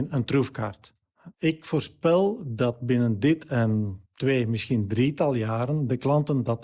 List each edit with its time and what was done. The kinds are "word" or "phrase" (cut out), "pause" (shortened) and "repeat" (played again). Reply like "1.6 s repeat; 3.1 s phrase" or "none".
1.3 s pause; 4.1 s pause